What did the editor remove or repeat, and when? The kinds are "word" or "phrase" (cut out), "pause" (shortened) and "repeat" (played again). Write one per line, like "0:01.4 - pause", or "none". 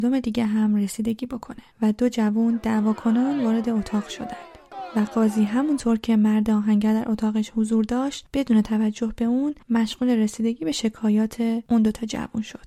0:01.7 - pause
0:09.6 - pause